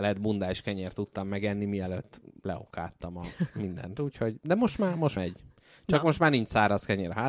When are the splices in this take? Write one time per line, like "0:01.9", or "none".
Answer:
0:05.2